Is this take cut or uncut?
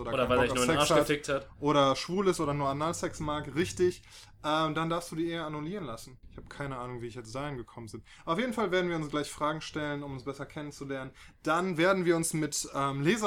uncut